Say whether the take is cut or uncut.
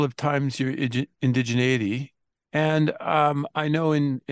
cut